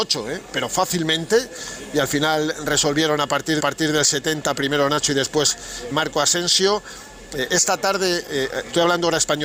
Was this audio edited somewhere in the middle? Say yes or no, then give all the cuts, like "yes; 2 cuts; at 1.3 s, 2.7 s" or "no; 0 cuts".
yes; 2 cuts; at 3.6 s, 5.9 s